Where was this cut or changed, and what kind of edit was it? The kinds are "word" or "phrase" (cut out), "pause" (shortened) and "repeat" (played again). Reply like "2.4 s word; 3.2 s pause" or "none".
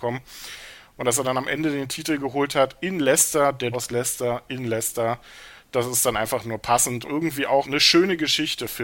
3.7 s word; 7.1 s word; 7.6 s word

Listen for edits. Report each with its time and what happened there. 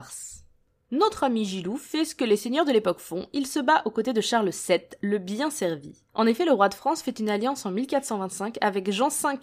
6.1 s pause

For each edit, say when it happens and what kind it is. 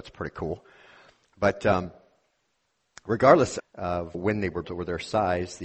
3.6 s word; 4.1 s word; 4.6 s word

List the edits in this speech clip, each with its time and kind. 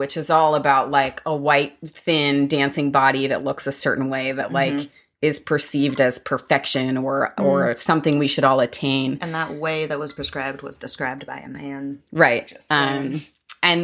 none

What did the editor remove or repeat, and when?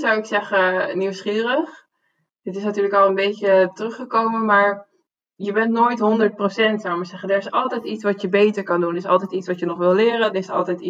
none

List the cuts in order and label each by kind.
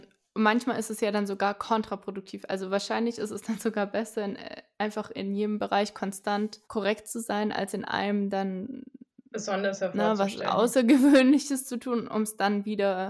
6.6 s pause

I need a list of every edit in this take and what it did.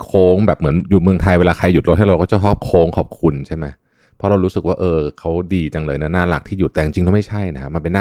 none

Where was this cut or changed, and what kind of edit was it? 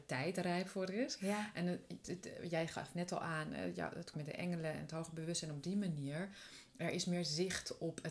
2.0 s word; 4.1 s word

